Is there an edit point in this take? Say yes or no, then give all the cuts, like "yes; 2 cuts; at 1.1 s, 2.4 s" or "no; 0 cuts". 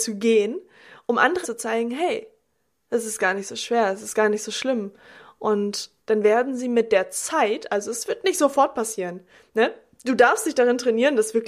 yes; 2 cuts; at 1.4 s, 6.0 s